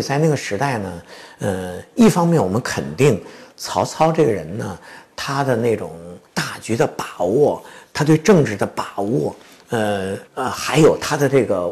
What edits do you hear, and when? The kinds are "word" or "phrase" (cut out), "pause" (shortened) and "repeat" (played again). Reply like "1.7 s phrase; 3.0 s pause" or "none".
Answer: 6.3 s pause; 10.3 s pause